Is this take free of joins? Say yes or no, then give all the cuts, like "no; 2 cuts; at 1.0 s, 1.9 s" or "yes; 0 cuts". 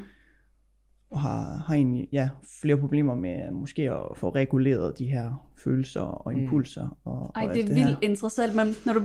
yes; 0 cuts